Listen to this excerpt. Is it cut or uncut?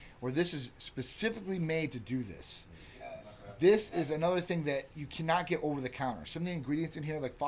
uncut